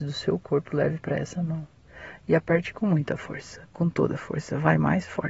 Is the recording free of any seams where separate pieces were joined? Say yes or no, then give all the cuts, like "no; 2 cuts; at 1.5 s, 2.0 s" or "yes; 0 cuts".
yes; 0 cuts